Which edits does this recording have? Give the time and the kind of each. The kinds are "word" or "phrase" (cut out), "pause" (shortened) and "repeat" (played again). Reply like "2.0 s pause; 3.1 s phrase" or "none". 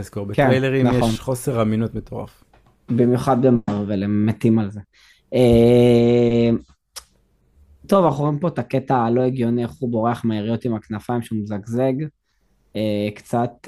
none